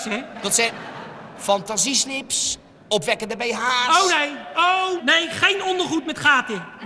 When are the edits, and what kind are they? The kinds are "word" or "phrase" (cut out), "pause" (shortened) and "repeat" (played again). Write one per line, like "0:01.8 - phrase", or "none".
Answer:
0:05.0 - word